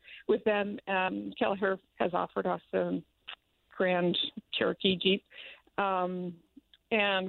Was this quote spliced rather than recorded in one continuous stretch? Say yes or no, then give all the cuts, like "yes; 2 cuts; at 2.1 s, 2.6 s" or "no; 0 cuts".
yes; 2 cuts; at 1.8 s, 3.4 s